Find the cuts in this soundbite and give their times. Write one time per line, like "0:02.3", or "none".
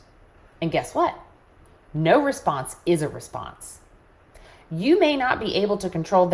none